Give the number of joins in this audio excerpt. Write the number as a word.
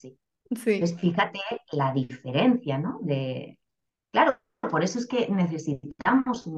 one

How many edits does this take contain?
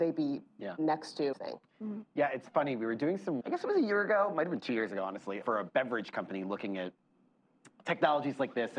three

